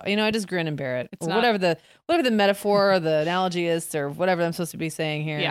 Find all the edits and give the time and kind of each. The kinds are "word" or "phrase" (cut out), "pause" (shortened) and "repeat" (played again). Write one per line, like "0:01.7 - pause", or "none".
none